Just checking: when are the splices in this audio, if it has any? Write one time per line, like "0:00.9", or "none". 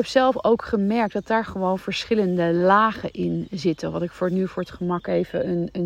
none